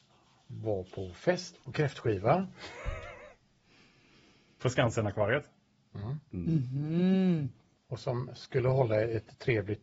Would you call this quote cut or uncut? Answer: uncut